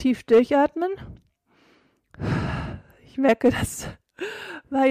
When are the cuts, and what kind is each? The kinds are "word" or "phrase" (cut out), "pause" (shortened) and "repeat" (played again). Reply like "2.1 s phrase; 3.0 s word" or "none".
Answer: none

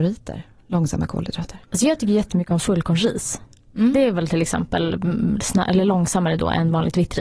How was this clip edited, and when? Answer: 1.6 s pause; 3.6 s pause

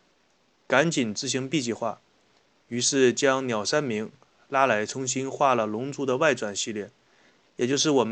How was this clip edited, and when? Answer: none

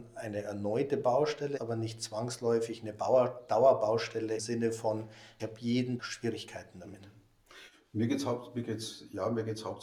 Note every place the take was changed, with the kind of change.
1.6 s word; 4.4 s word; 5.4 s word; 6.0 s word

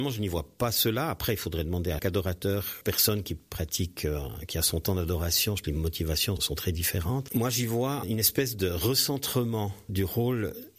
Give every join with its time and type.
2.0 s word; 2.8 s word; 5.6 s word; 6.4 s word; 8.0 s word; 9.9 s word

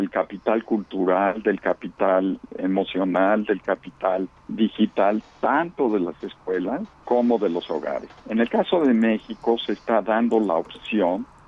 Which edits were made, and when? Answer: 2.6 s word; 4.4 s pause; 6.9 s pause; 8.2 s pause

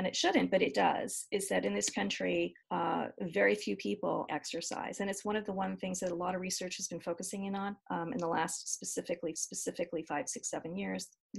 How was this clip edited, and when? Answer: 2.6 s pause; 4.3 s word; 7.8 s pause; 9.4 s repeat

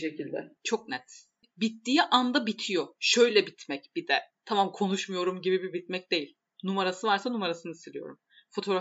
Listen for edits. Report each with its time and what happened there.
none

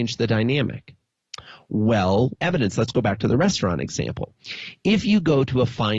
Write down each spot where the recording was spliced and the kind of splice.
2.4 s phrase

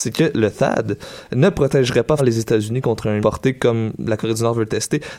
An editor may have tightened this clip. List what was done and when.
2.2 s word; 3.2 s phrase

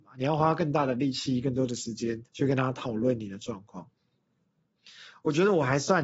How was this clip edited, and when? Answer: 2.3 s pause

